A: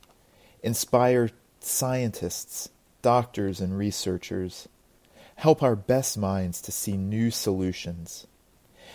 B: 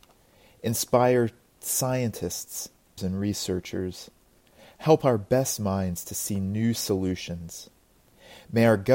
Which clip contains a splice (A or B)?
B